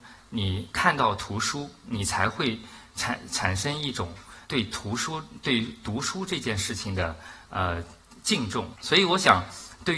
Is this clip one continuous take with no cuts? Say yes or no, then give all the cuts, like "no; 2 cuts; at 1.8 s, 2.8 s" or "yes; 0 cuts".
no; 2 cuts; at 4.4 s, 8.7 s